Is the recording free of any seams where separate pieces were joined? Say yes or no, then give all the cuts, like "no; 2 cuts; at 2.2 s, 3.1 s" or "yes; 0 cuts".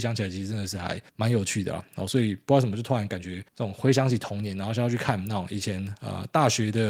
no; 2 cuts; at 1.1 s, 3.5 s